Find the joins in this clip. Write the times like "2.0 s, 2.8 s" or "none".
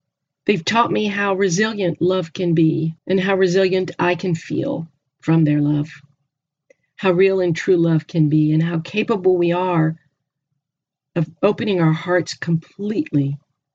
3.0 s